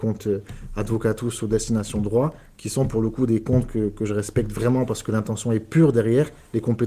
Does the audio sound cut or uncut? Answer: uncut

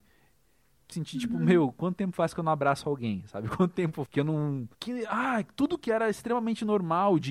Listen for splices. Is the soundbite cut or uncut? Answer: cut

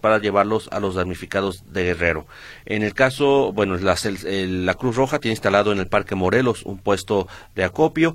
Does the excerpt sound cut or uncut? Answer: uncut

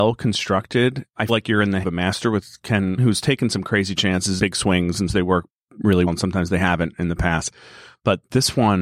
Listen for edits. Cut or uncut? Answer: cut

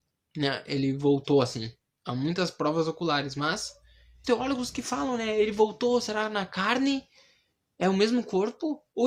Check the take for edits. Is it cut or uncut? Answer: cut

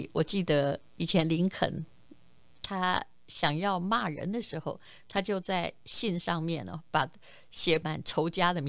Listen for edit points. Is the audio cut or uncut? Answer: uncut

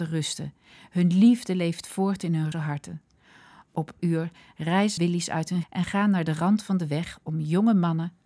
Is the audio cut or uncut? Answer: cut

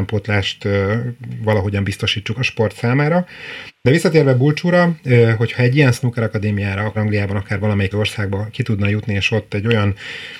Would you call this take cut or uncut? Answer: cut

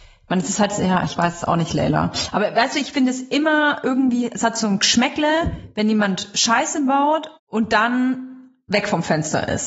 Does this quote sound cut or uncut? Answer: cut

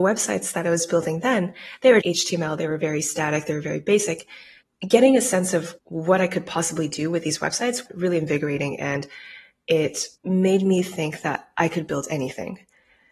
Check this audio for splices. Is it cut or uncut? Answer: cut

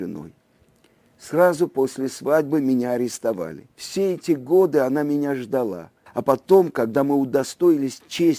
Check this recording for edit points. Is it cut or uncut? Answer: cut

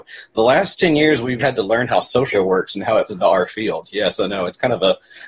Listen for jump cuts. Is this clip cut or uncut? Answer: cut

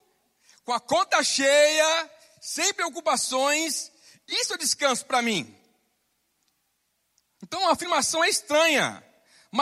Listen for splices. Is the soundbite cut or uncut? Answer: uncut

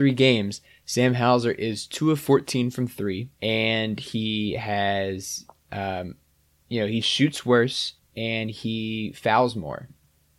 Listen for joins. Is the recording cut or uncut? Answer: cut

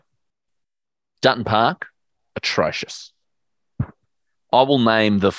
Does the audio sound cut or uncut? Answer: uncut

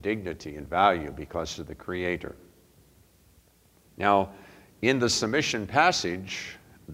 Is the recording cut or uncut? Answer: uncut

